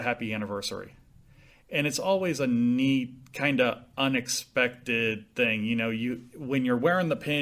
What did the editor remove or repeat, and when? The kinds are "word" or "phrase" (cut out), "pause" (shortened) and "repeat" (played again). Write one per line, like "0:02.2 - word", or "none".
none

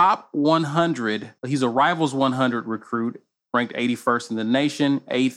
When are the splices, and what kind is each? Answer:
0:01.4 - pause

